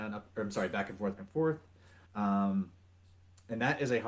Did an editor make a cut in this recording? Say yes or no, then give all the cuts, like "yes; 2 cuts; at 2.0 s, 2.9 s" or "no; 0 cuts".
yes; 2 cuts; at 1.2 s, 2.1 s